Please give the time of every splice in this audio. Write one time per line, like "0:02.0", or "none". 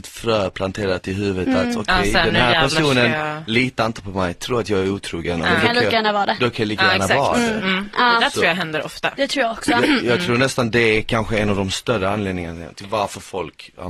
none